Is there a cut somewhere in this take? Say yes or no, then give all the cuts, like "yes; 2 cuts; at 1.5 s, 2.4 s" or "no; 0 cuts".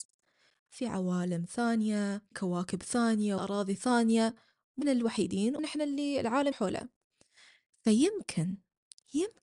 yes; 5 cuts; at 2.3 s, 3.4 s, 4.8 s, 5.6 s, 6.5 s